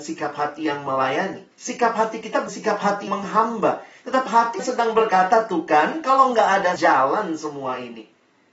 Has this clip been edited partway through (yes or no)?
yes